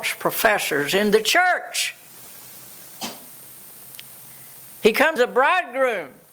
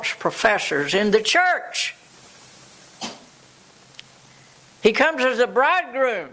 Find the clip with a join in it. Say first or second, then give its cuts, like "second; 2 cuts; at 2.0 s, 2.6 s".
first; 1 cut; at 5.2 s